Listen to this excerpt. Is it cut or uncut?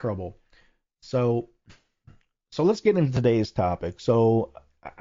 uncut